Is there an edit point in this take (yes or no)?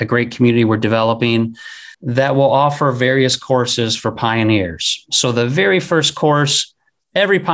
yes